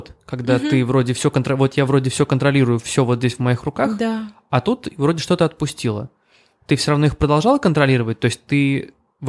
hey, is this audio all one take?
yes; 0 cuts

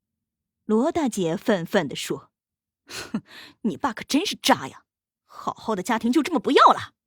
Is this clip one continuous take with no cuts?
no; 1 cut; at 2.4 s

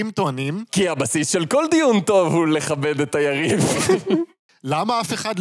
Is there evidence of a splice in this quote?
no; 0 cuts

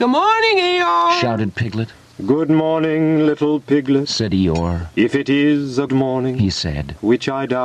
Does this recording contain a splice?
yes; 1 cut; at 5.9 s

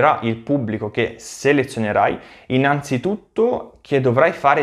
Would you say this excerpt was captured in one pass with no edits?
yes; 0 cuts

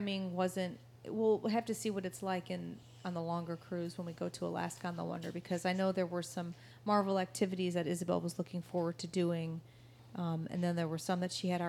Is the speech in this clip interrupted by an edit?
no; 0 cuts

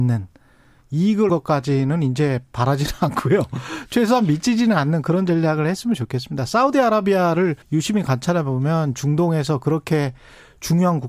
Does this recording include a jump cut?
yes; 2 cuts; at 1.3 s, 7.6 s

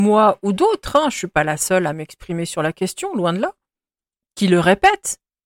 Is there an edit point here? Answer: no; 0 cuts

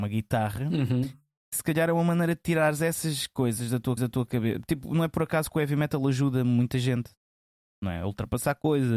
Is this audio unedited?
no; 1 cut; at 4.0 s

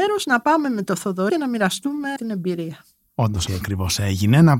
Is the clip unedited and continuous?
no; 3 cuts; at 1.3 s, 2.2 s, 3.5 s

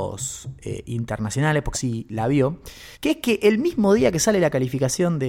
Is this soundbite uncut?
no; 2 cuts; at 1.7 s, 2.9 s

